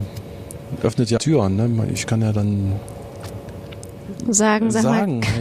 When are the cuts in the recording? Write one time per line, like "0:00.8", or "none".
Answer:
0:01.2